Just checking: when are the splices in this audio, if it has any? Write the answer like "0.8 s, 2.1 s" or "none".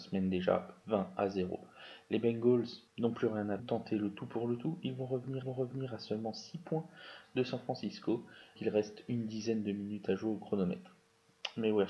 2.9 s, 3.6 s, 5.4 s, 8.6 s